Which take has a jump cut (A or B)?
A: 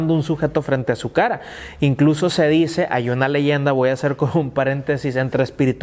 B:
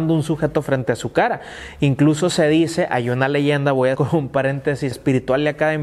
B